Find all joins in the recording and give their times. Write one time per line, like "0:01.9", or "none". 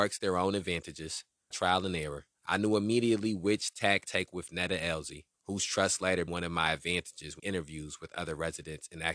0:01.5
0:02.3
0:04.0
0:05.3
0:06.3
0:07.4

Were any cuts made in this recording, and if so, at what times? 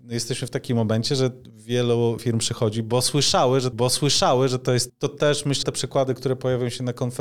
0:02.2
0:03.7
0:04.9
0:05.6

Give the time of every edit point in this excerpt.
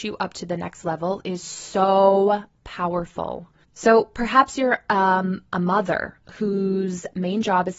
0:03.6

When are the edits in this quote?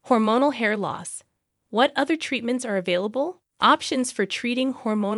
0:03.5

